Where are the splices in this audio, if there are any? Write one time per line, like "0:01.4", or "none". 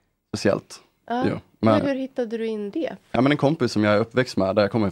0:01.8
0:02.7
0:03.2